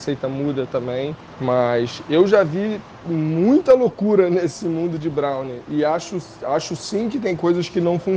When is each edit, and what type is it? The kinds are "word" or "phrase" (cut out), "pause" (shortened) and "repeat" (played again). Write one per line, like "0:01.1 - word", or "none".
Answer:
none

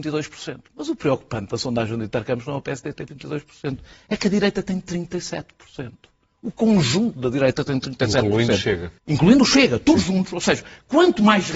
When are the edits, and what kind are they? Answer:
0:09.0 - pause

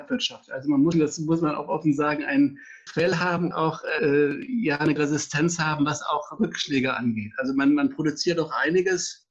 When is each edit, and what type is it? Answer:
0:00.9 - word
0:02.9 - word
0:03.5 - word
0:04.0 - word
0:05.0 - word
0:06.4 - word

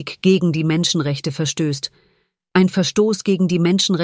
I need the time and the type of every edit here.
none

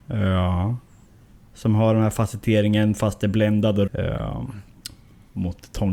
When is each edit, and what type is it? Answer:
0:03.9 - phrase

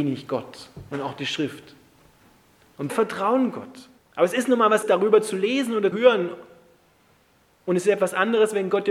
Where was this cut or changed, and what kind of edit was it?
0:02.9 - word
0:04.0 - pause
0:04.8 - word
0:05.9 - word

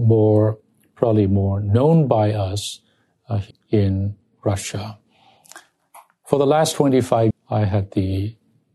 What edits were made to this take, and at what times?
0:03.5 - word
0:07.3 - word

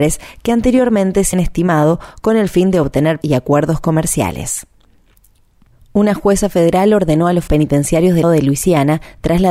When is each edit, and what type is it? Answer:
0:01.3 - word
0:03.2 - word
0:07.5 - word
0:08.2 - word

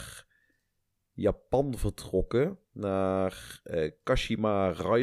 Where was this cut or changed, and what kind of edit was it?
none

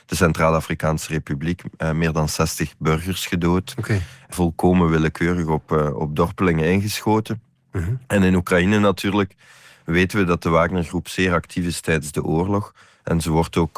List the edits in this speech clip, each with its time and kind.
none

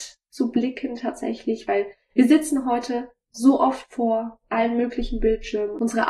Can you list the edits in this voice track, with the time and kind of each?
none

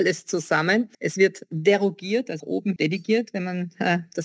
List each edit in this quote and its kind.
0:00.9 - pause
0:02.4 - word
0:02.8 - word

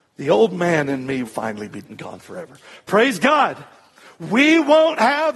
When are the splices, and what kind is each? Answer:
0:01.2 - word
0:01.8 - word

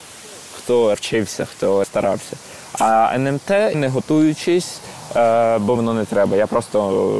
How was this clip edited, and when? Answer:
0:00.9 - word
0:01.8 - word
0:03.7 - word
0:05.8 - word

